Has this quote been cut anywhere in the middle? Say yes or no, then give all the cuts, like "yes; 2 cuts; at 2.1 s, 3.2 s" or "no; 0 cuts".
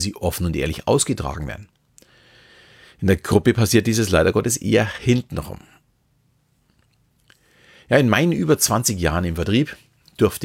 no; 0 cuts